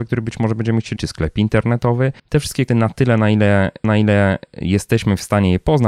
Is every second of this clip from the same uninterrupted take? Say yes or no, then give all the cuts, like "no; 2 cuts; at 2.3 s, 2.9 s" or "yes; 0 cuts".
no; 4 cuts; at 1.0 s, 2.2 s, 2.7 s, 3.8 s